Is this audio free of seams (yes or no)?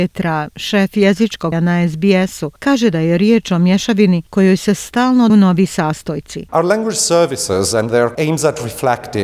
no